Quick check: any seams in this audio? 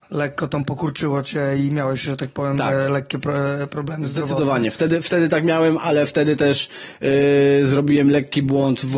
no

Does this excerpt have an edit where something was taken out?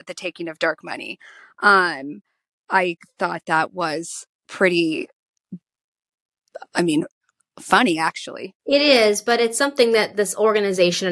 yes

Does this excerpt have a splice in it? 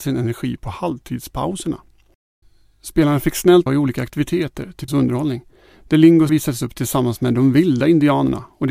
yes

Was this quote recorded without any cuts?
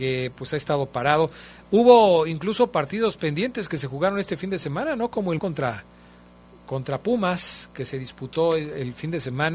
no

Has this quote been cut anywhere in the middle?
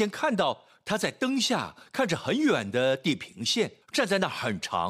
yes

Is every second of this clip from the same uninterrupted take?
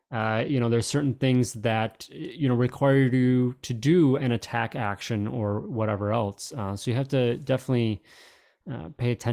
yes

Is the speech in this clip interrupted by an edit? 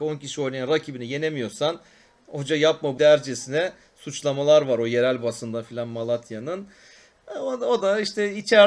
yes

